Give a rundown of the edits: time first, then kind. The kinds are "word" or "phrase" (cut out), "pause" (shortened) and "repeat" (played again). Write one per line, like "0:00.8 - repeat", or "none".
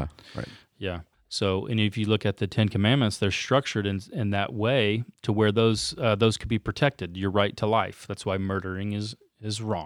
0:01.1 - pause
0:05.1 - pause